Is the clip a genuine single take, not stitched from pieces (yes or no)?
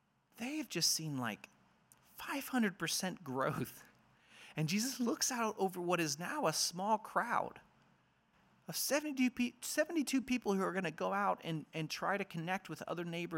yes